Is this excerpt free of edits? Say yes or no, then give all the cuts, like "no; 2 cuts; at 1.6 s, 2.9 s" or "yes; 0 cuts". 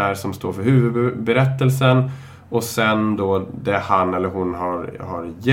yes; 0 cuts